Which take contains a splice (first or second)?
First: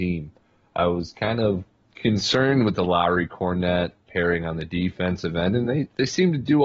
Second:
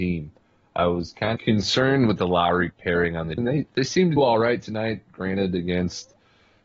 second